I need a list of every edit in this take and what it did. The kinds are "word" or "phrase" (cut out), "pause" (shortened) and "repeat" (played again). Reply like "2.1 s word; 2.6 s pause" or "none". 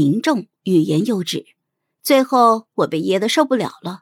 1.7 s pause